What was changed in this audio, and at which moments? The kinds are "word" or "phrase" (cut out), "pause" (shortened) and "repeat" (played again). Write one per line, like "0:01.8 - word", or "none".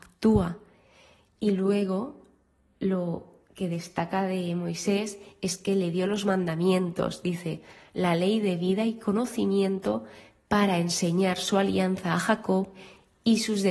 none